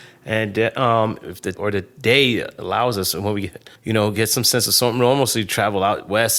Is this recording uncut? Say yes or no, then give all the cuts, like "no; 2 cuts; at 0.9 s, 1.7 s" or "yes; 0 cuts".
no; 2 cuts; at 1.5 s, 3.8 s